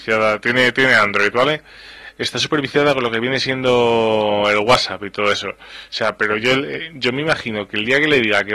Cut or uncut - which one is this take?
uncut